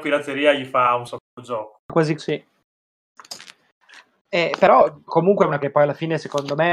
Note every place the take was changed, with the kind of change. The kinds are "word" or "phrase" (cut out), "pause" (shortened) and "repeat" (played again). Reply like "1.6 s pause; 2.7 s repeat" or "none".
2.2 s word; 5.1 s word; 5.6 s word